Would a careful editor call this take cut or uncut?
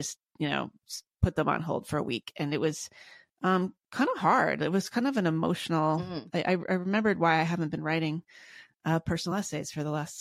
uncut